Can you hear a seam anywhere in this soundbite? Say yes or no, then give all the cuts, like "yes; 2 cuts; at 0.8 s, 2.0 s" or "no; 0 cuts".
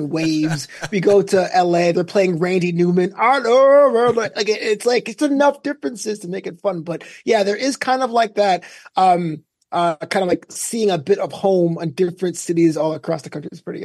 no; 0 cuts